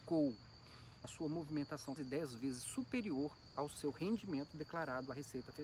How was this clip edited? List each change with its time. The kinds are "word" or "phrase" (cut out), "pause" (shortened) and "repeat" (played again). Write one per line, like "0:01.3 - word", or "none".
0:01.0 - word
0:02.0 - phrase

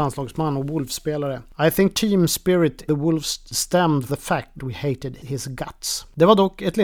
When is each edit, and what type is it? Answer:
0:01.9 - word
0:02.9 - word
0:03.5 - word
0:04.1 - word
0:04.6 - word
0:05.2 - word

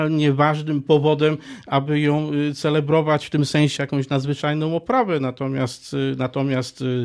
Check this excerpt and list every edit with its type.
0:03.8 - phrase

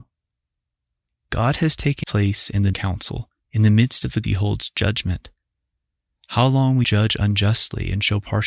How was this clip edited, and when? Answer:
0:02.0 - word
0:02.7 - word
0:03.4 - pause
0:04.2 - word
0:06.8 - word

